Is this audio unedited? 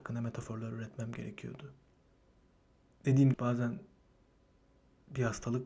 no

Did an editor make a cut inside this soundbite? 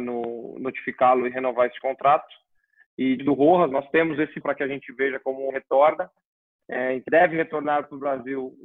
yes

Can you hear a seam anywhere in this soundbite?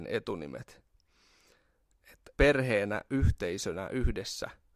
yes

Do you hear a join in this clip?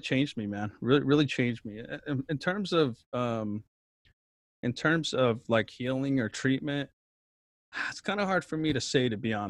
no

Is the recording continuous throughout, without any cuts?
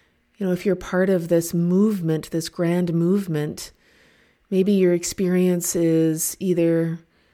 yes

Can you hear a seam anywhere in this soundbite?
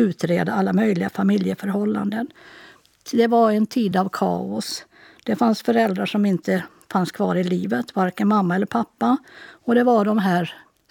no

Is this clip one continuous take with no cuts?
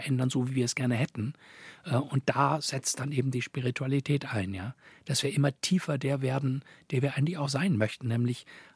yes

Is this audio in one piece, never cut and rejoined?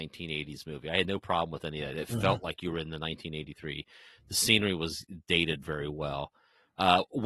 yes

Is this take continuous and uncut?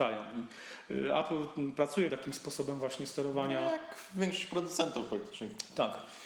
no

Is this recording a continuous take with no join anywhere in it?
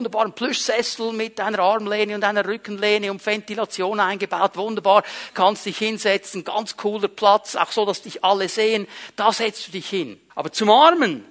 no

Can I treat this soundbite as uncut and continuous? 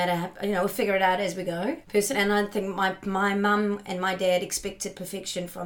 no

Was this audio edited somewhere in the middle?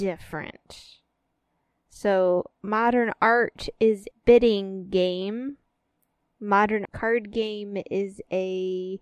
yes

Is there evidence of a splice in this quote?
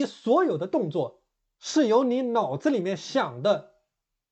no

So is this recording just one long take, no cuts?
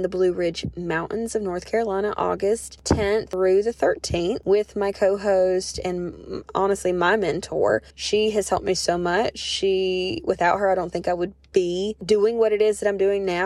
no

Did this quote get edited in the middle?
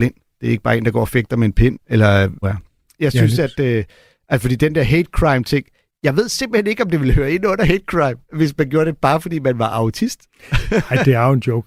yes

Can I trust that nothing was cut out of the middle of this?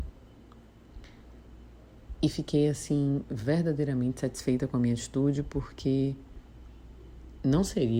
yes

